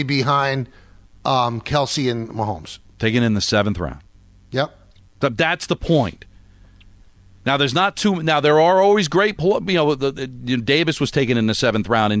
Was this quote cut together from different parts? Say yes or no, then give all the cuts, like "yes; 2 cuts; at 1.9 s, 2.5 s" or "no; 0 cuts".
no; 0 cuts